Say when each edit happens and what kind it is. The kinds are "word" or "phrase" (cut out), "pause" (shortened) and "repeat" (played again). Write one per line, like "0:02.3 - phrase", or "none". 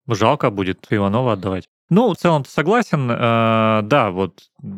0:00.9 - word
0:02.1 - word